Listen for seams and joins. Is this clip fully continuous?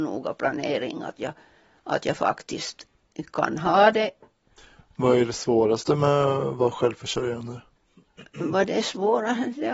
yes; 0 cuts

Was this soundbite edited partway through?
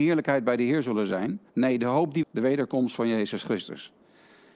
yes; 2 cuts; at 1.5 s, 2.2 s

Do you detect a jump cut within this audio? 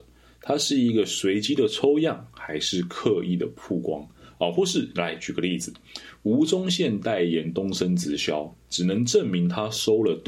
no; 0 cuts

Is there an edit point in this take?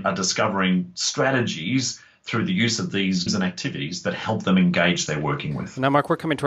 yes; 2 cuts; at 3.3 s, 5.1 s

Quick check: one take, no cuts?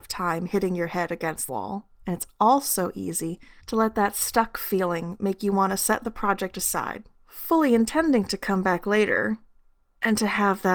no; 4 cuts; at 1.5 s, 2.0 s, 3.6 s, 7.1 s

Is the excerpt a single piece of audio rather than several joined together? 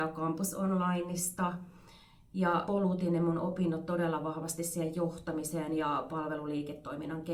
no; 1 cut; at 2.7 s

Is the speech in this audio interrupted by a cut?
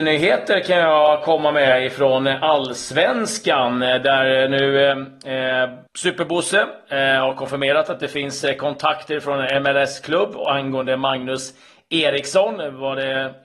yes; 1 cut; at 5.9 s

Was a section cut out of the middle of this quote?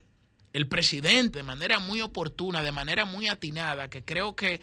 yes; 1 cut; at 1.3 s

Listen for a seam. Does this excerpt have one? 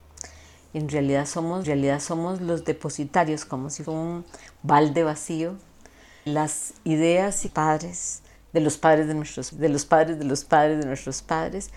yes; 6 cuts; at 1.6 s, 3.8 s, 6.3 s, 7.5 s, 8.4 s, 9.5 s

